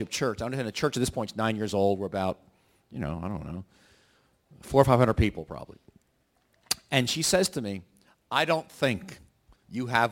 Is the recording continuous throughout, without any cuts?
yes; 0 cuts

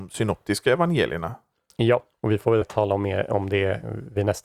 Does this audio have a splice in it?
yes; 2 cuts; at 2.2 s, 2.6 s

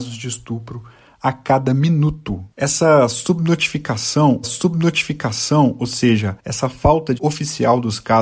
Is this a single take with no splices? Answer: no; 4 cuts; at 2.5 s, 4.4 s, 6.4 s, 7.2 s

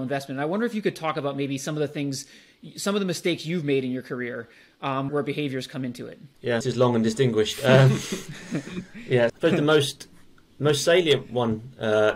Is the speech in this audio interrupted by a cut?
yes; 3 cuts; at 5.1 s, 6.6 s, 9.3 s

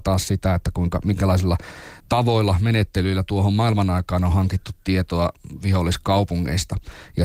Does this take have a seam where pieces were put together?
yes; 1 cut; at 2.0 s

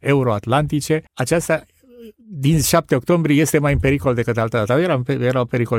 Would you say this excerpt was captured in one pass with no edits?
no; 1 cut; at 1.1 s

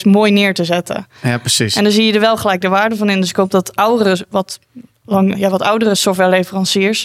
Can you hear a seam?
yes; 1 cut; at 5.3 s

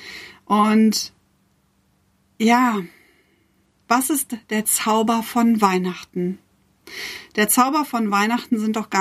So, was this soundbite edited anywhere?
no; 0 cuts

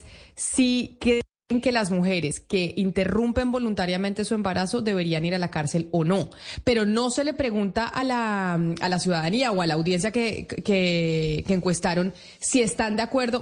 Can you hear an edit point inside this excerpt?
no; 0 cuts

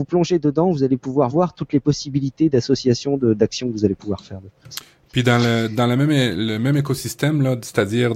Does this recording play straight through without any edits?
yes; 0 cuts

